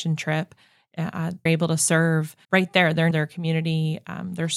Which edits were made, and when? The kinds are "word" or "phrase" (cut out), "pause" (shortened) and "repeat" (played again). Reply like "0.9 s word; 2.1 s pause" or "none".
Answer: 1.5 s word; 2.4 s word; 3.1 s word